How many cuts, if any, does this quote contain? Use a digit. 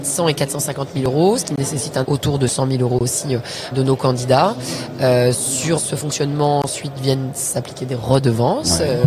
3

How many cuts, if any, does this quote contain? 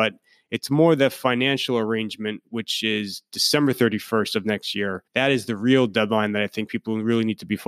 1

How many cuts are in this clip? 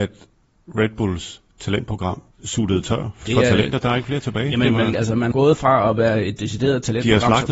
4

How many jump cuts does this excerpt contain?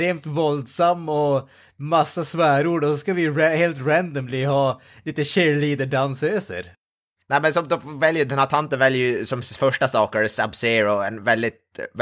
0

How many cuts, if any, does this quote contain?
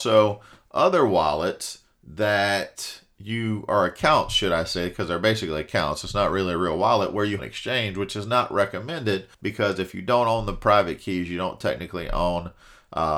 2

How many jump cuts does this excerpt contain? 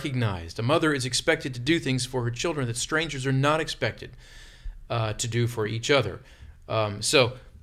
0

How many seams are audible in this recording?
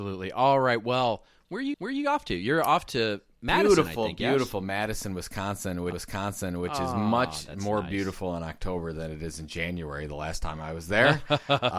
2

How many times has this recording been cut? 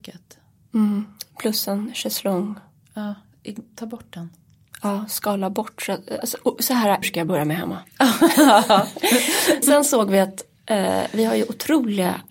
2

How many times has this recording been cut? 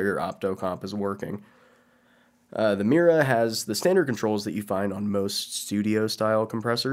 0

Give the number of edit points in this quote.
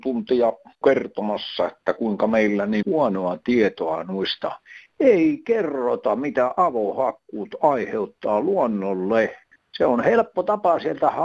1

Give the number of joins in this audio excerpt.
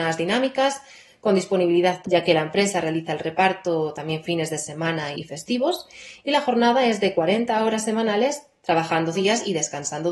3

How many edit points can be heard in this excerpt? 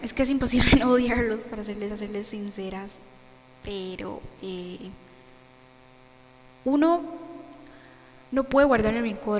2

